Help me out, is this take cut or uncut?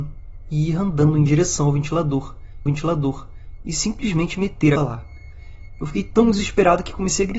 cut